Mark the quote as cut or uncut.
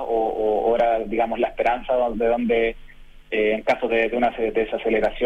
uncut